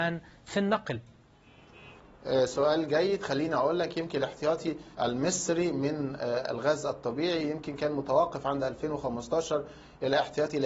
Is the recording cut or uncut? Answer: cut